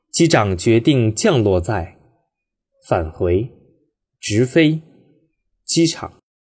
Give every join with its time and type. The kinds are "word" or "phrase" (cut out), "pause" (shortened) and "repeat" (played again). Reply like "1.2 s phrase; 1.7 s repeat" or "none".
none